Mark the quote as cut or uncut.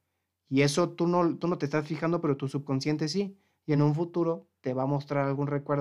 uncut